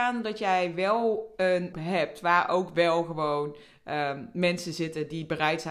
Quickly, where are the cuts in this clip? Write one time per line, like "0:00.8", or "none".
0:01.7